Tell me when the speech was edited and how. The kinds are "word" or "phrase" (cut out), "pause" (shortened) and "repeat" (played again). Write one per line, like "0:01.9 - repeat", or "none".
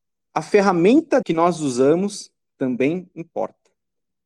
0:01.2 - word